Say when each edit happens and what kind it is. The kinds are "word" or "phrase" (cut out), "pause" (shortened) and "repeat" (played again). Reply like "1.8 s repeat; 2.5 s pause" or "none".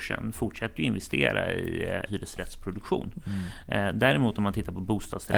2.1 s word